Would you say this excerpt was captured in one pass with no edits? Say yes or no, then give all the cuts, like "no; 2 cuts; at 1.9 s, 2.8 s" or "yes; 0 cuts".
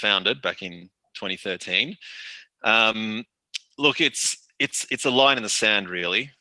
yes; 0 cuts